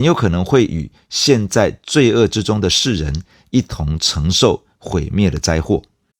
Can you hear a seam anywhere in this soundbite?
no; 0 cuts

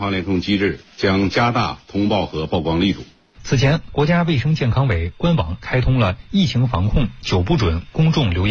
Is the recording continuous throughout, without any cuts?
yes; 0 cuts

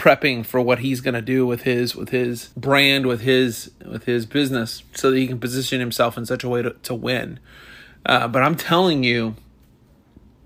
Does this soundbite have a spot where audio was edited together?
yes; 2 cuts; at 2.5 s, 4.9 s

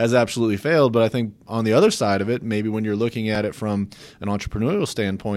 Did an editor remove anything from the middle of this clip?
no; 0 cuts

